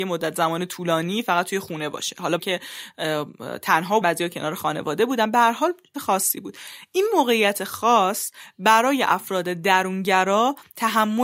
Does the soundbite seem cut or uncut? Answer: cut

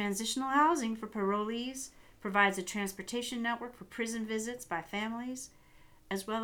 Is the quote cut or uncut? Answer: uncut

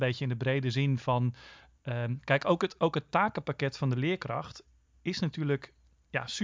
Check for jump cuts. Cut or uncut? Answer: uncut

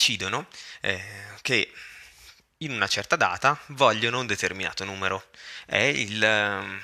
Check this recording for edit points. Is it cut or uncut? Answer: uncut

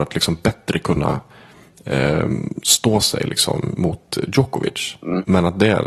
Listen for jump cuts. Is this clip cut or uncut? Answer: uncut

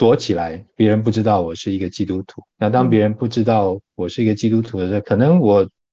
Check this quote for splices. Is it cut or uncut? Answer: cut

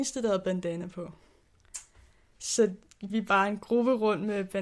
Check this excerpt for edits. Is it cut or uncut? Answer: cut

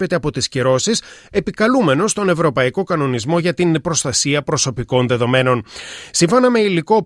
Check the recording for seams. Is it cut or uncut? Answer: uncut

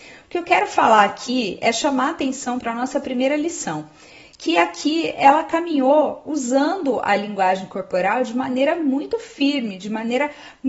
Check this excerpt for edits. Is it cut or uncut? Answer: uncut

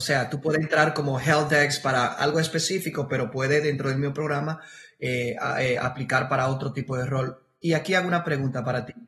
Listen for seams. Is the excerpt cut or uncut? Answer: uncut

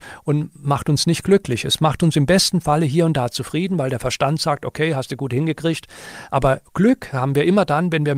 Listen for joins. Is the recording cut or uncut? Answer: uncut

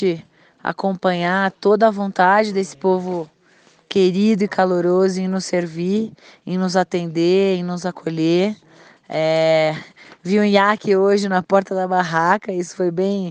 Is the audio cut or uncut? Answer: uncut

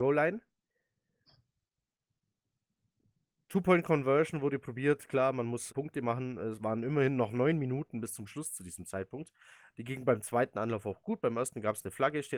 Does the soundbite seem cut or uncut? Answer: cut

